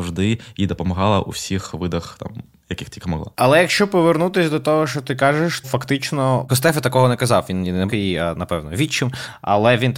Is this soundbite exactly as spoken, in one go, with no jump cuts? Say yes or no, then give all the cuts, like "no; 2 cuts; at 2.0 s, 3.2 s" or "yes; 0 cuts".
no; 4 cuts; at 3.3 s, 5.6 s, 6.5 s, 7.9 s